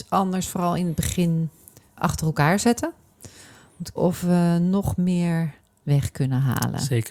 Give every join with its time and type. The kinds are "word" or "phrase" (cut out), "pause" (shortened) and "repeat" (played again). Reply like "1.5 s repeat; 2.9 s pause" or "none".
2.0 s word; 4.0 s word; 5.8 s word